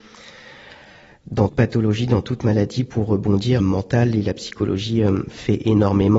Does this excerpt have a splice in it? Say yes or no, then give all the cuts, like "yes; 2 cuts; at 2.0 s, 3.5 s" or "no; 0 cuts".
yes; 2 cuts; at 1.5 s, 3.6 s